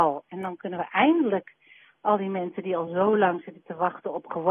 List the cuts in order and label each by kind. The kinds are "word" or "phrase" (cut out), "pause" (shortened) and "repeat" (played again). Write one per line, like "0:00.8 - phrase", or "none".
none